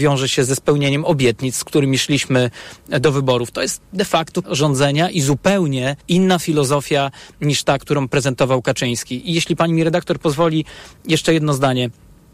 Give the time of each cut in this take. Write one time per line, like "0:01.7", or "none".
0:04.4
0:06.0